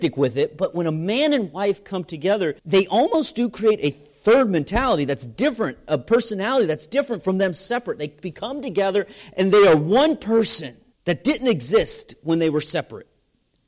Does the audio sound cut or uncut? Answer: cut